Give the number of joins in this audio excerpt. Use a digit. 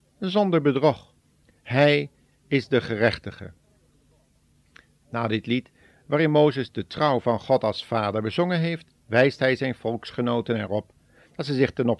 1